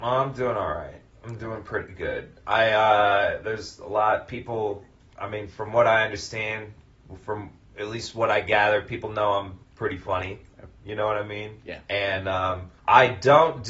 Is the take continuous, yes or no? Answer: no